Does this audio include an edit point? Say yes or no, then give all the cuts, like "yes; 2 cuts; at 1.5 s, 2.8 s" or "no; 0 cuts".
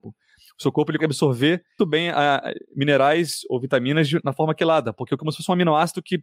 yes; 3 cuts; at 1.0 s, 1.8 s, 5.2 s